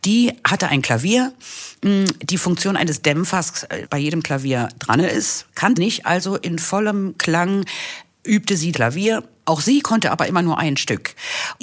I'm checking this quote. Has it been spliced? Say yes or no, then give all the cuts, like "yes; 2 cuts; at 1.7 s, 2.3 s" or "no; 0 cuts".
yes; 3 cuts; at 3.8 s, 5.8 s, 8.7 s